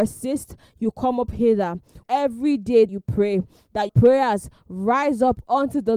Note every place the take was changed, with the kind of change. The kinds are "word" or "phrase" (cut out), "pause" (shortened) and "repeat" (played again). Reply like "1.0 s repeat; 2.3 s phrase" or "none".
2.0 s word; 2.9 s word; 3.9 s word